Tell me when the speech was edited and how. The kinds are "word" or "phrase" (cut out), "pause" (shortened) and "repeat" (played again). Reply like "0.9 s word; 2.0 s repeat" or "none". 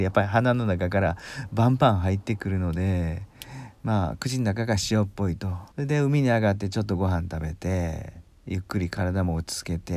3.8 s pause; 5.7 s pause; 8.3 s pause